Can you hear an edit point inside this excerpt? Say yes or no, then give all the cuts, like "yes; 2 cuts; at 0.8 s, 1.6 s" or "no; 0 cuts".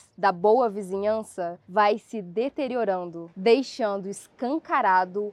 no; 0 cuts